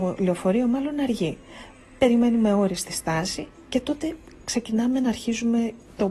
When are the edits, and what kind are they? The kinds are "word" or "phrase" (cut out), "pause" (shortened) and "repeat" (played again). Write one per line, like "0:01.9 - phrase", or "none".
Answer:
none

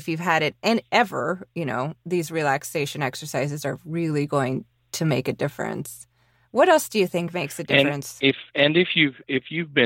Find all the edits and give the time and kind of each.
none

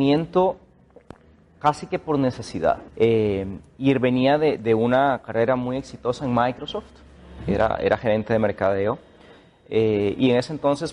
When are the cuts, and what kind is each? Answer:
0:02.9 - pause

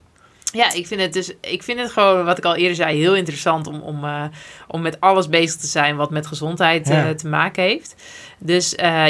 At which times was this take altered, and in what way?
none

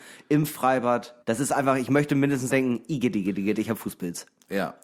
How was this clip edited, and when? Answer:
0:01.2 - pause
0:02.5 - word

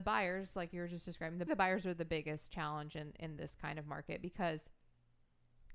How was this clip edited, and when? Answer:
0:01.5 - phrase

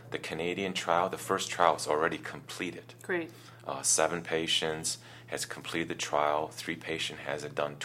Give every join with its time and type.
none

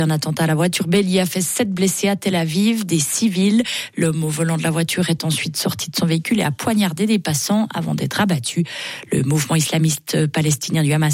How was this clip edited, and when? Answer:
none

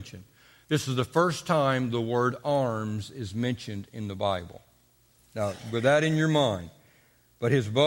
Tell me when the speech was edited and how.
none

